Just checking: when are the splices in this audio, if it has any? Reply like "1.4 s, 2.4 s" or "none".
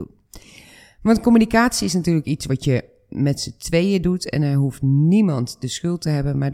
none